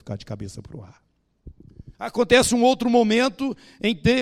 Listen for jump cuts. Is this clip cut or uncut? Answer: cut